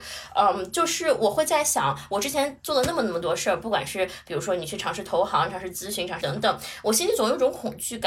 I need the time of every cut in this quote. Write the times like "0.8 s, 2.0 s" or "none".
6.2 s